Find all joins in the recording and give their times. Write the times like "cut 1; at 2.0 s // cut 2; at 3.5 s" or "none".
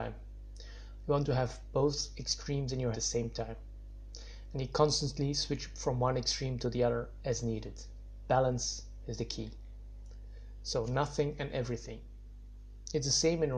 cut 1; at 2.9 s